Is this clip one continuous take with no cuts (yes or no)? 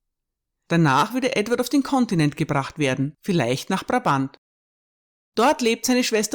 yes